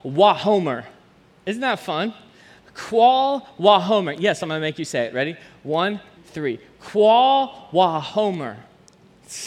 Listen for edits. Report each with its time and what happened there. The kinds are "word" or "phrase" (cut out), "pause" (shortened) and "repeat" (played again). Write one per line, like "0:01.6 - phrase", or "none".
0:06.2 - word